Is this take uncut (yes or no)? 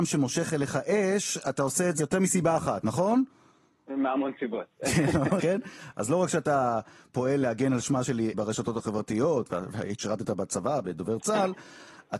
no